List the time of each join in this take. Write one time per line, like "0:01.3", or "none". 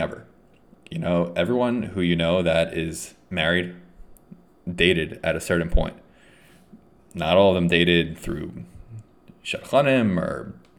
none